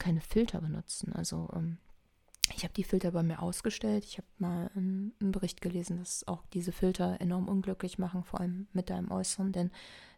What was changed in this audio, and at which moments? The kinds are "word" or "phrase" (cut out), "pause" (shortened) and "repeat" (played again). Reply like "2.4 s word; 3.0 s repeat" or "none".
none